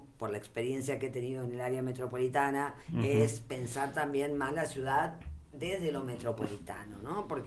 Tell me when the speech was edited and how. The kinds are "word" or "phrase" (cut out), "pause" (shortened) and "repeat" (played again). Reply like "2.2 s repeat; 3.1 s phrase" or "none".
2.8 s pause